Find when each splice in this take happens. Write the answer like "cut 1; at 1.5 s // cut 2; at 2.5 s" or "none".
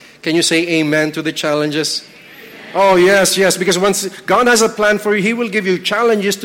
none